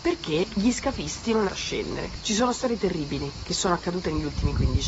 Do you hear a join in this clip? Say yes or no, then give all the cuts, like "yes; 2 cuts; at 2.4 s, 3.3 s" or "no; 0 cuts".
yes; 1 cut; at 1.5 s